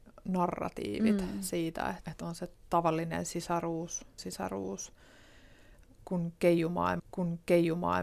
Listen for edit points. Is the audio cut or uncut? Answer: cut